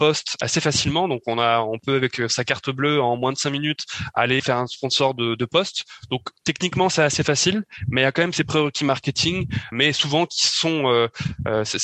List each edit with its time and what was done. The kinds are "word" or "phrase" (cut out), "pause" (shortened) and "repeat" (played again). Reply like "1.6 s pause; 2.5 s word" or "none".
4.4 s word; 9.7 s word